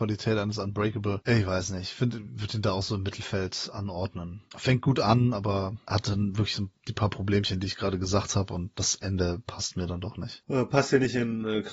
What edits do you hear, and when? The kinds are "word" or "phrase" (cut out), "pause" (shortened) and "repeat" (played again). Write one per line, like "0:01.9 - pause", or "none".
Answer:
none